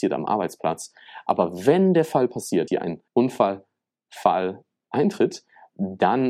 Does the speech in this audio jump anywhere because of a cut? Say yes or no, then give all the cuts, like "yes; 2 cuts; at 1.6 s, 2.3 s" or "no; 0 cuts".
yes; 2 cuts; at 2.7 s, 3.1 s